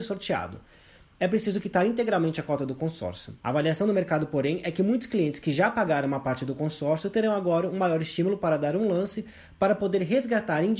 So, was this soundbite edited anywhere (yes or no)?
no